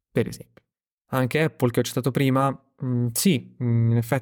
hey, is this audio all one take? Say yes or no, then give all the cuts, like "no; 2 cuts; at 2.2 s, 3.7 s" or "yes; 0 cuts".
yes; 0 cuts